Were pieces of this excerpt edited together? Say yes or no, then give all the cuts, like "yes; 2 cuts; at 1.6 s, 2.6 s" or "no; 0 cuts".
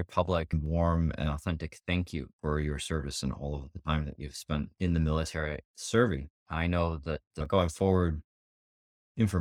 yes; 2 cuts; at 2.3 s, 4.7 s